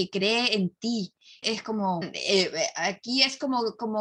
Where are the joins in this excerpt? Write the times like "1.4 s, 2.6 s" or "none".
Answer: 1.4 s, 2.0 s